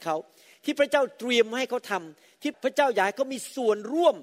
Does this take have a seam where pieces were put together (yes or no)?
no